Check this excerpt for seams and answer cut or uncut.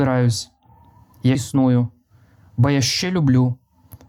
cut